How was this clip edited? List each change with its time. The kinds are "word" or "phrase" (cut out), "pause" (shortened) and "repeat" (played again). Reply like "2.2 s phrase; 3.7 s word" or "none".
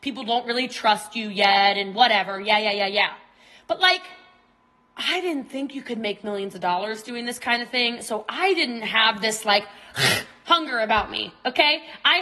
none